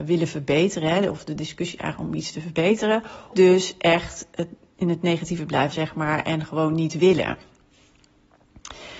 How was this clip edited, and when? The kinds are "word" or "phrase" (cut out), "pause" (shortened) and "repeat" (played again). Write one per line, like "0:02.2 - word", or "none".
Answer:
0:03.3 - word
0:05.7 - word